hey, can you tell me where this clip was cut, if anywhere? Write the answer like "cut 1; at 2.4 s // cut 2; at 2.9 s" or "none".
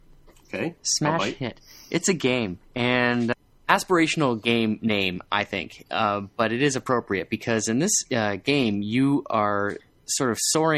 none